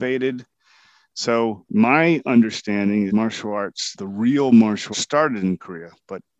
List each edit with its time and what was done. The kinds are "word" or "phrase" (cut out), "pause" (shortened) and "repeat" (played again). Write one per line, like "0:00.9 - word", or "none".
0:03.1 - word
0:03.9 - word
0:04.9 - word